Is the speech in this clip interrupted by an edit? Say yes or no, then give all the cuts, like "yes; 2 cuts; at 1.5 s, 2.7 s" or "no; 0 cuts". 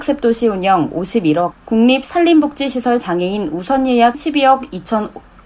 yes; 2 cuts; at 1.5 s, 4.1 s